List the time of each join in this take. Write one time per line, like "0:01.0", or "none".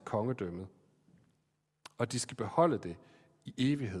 none